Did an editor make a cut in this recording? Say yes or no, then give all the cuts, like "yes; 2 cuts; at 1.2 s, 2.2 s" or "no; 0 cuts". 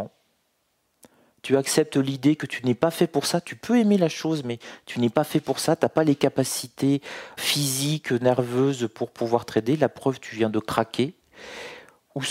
yes; 1 cut; at 7.4 s